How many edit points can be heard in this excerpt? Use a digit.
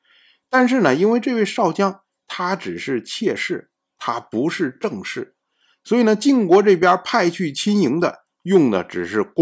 0